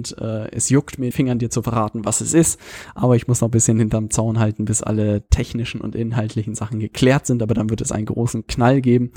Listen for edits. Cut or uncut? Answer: cut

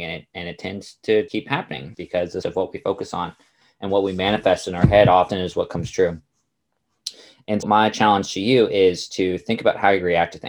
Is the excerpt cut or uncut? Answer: cut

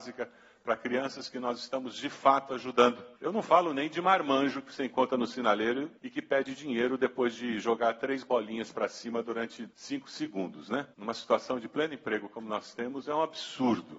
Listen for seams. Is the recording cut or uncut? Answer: cut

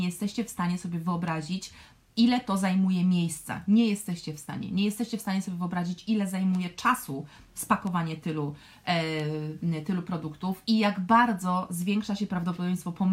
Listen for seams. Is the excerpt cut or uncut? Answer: uncut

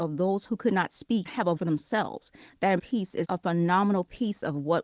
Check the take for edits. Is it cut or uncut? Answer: cut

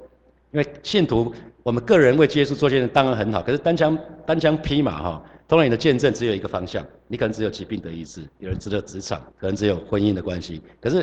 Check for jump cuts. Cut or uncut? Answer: cut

